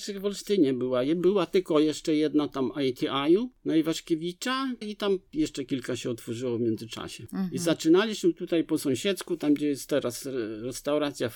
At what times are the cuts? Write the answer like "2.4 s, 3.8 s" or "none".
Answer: 4.8 s